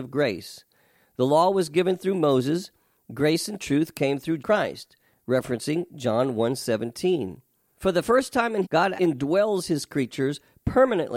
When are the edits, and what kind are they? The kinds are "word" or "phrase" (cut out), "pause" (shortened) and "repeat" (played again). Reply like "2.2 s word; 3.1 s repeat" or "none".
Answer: 4.4 s word; 8.6 s word; 9.0 s word